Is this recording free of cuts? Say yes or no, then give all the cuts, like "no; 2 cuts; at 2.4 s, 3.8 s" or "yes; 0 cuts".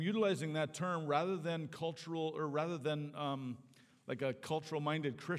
yes; 0 cuts